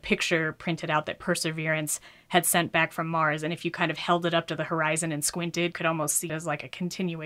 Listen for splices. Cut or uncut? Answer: cut